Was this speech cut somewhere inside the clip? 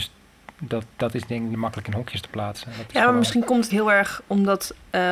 yes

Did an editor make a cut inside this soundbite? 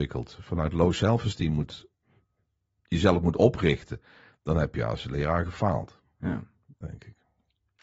no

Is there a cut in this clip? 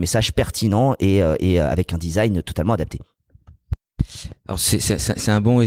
no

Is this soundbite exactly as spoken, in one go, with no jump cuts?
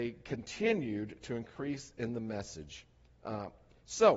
yes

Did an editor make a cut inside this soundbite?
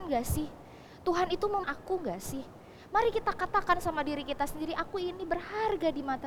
yes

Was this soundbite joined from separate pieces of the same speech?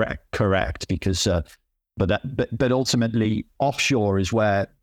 no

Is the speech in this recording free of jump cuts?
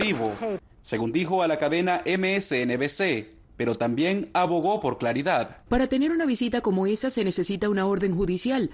no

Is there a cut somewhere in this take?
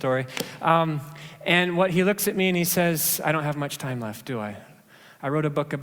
no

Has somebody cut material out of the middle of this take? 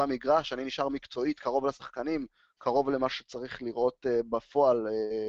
no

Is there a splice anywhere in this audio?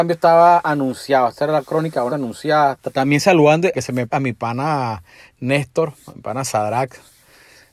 yes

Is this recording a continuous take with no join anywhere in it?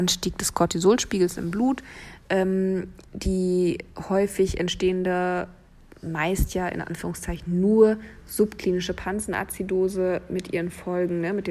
yes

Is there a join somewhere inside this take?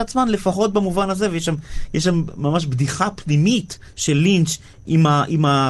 no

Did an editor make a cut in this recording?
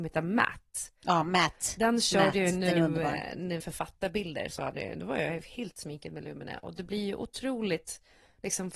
yes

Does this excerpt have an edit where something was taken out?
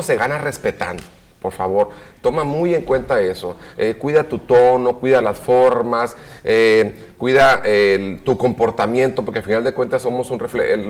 no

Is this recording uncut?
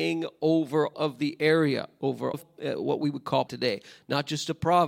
no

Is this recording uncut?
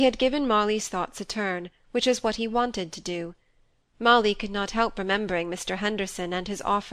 yes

